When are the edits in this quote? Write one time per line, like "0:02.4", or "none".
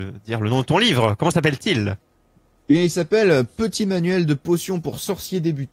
none